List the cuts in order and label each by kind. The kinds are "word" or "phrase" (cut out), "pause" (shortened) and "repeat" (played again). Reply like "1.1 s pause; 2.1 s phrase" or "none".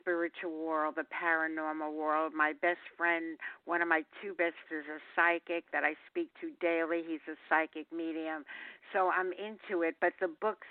4.7 s word